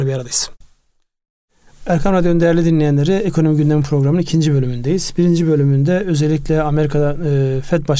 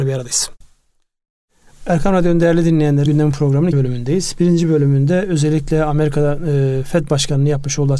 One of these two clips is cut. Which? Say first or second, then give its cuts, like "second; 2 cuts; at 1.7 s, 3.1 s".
second; 2 cuts; at 3.1 s, 3.7 s